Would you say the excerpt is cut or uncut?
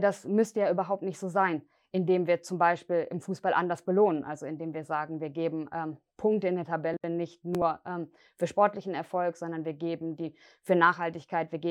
uncut